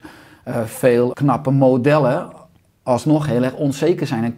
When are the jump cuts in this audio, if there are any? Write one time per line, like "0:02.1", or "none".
0:01.1